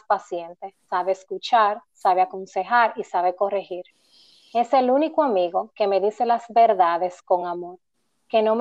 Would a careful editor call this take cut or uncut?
uncut